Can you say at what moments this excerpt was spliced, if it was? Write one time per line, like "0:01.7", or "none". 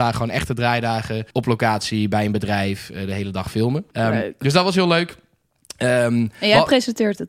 0:01.3
0:03.9

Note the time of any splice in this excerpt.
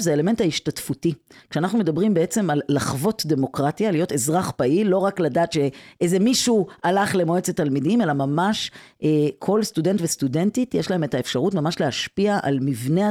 none

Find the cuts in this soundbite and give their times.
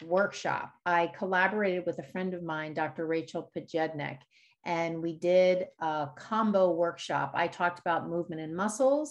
none

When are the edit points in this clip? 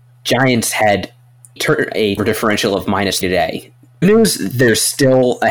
0:01.6
0:02.2
0:03.2
0:04.0

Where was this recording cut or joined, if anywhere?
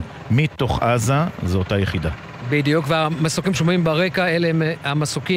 0:03.5

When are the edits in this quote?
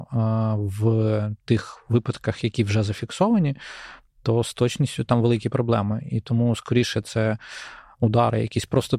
none

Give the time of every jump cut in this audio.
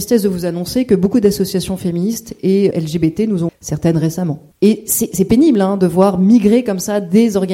0:02.7
0:03.5

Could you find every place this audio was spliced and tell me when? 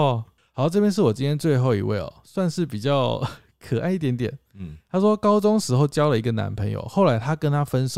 none

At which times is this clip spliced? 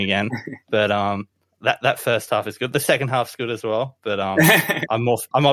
none

